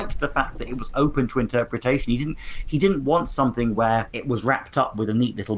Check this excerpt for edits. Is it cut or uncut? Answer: uncut